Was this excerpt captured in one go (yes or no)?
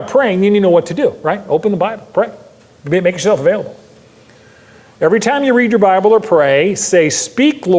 yes